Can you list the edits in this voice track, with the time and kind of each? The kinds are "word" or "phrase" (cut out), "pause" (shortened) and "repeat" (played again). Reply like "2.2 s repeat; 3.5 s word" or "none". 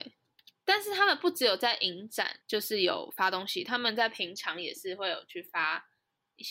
2.4 s pause